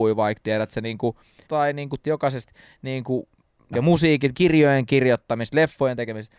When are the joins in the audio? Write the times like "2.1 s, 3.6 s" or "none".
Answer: 1.5 s, 2.0 s, 3.7 s, 4.3 s